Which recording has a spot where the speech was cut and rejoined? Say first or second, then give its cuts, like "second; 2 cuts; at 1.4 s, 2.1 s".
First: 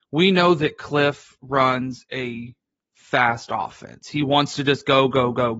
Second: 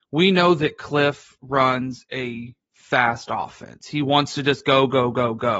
second; 1 cut; at 2.6 s